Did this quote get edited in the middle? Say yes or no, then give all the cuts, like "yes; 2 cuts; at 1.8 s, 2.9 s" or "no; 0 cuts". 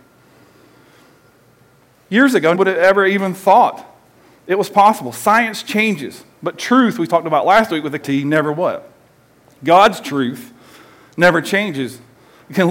yes; 2 cuts; at 2.5 s, 8.0 s